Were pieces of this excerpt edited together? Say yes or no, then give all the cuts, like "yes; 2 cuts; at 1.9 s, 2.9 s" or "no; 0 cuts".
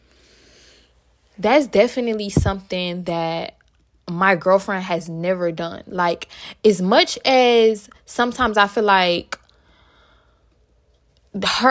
no; 0 cuts